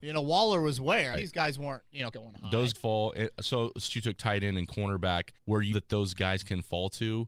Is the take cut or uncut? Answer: cut